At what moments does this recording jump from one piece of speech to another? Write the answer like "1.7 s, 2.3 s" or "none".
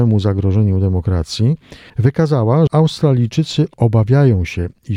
2.7 s